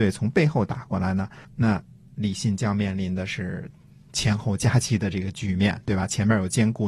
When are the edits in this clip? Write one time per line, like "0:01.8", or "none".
none